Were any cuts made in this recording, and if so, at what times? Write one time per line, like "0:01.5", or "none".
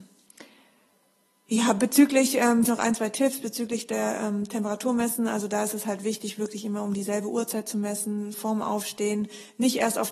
0:02.7